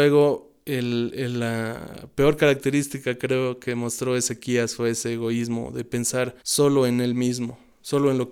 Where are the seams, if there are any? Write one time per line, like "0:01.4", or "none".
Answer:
0:06.4